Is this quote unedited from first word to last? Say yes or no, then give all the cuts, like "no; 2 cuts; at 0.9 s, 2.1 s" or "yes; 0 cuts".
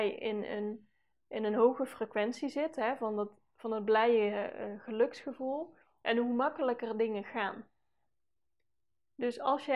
yes; 0 cuts